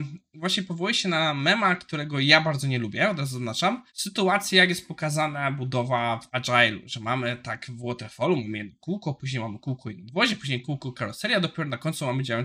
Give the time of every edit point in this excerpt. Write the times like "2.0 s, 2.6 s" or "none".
3.9 s